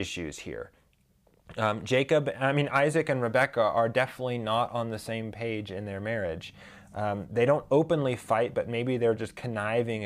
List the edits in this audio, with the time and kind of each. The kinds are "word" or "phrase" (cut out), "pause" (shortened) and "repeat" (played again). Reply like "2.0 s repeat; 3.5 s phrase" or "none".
none